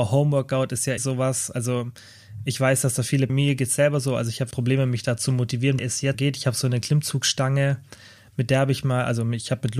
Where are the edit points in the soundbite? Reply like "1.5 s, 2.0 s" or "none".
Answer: 1.0 s, 3.3 s, 4.5 s, 5.8 s, 6.1 s